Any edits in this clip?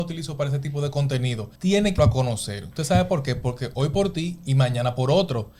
yes; 2 cuts; at 1.6 s, 2.0 s

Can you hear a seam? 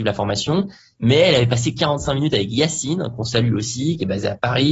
no; 0 cuts

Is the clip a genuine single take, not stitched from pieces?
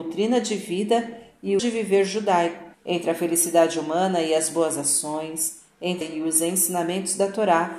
no; 3 cuts; at 1.6 s, 2.7 s, 6.0 s

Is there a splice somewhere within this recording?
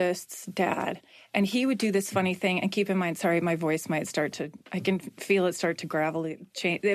no; 0 cuts

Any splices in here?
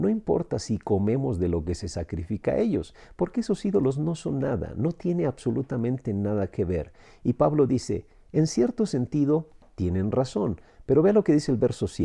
no; 0 cuts

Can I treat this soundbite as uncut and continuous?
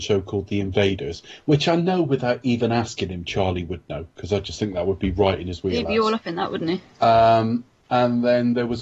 yes; 0 cuts

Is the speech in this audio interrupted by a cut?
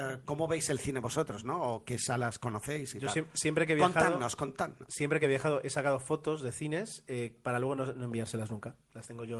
no; 0 cuts

